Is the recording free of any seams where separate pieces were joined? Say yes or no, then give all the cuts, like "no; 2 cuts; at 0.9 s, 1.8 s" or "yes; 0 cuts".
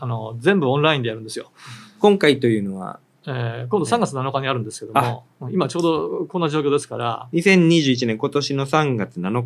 yes; 0 cuts